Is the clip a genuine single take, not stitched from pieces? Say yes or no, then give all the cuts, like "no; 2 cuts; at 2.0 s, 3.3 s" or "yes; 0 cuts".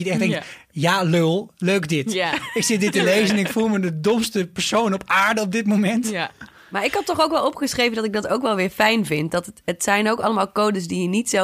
yes; 0 cuts